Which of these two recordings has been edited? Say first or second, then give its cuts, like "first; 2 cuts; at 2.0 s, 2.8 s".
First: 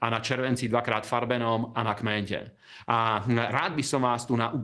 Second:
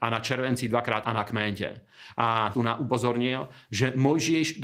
second; 2 cuts; at 1.0 s, 2.5 s